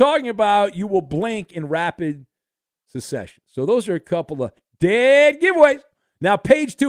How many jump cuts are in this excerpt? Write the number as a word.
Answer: zero